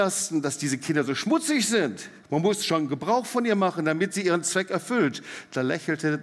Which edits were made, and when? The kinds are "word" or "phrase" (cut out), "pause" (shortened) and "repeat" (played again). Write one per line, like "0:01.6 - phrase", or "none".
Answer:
0:02.2 - pause